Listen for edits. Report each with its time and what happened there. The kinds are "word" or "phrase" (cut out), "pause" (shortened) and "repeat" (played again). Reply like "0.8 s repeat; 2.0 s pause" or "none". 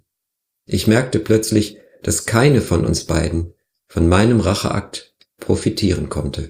none